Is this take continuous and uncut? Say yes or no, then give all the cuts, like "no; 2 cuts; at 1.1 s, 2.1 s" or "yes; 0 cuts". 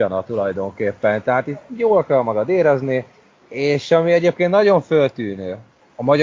yes; 0 cuts